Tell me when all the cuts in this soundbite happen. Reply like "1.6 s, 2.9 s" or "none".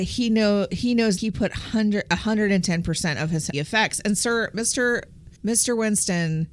1.2 s, 3.5 s, 5.4 s